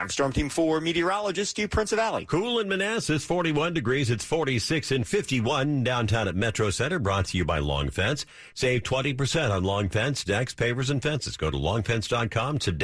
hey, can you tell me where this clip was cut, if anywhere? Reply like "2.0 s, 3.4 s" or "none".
5.1 s